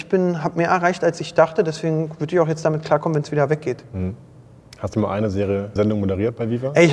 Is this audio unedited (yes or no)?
no